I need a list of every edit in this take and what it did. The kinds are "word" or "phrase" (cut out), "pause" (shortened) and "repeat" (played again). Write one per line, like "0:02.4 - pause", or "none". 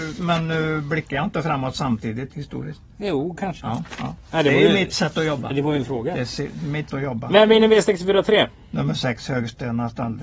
0:02.3 - phrase
0:02.9 - pause
0:04.3 - pause
0:06.9 - word